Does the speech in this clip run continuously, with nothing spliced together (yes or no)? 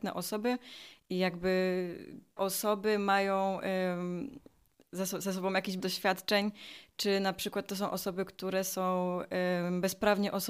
no